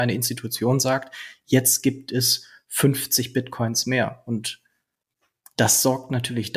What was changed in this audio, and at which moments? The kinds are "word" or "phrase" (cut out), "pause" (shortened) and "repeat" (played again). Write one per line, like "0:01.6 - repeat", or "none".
none